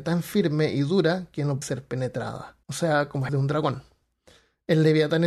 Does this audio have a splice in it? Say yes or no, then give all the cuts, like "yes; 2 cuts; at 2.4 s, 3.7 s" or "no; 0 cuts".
yes; 3 cuts; at 1.6 s, 2.6 s, 3.3 s